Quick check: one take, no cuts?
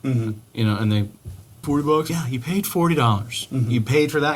no; 2 cuts; at 1.6 s, 2.1 s

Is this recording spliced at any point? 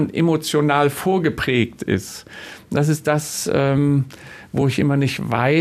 no; 0 cuts

